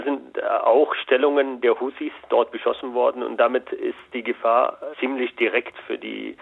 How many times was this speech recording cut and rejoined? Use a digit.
1